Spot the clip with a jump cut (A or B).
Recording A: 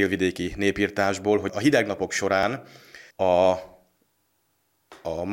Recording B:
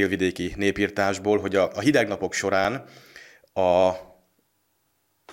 A